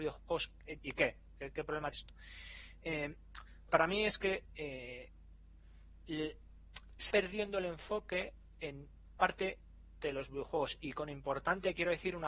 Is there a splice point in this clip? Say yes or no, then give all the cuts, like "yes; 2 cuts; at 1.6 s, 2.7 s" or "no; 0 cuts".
yes; 5 cuts; at 1.9 s, 3.7 s, 7.1 s, 9.2 s, 10.0 s